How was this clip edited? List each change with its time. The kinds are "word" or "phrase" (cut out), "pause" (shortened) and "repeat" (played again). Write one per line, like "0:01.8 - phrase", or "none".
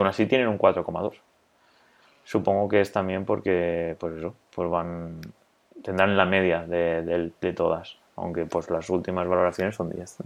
none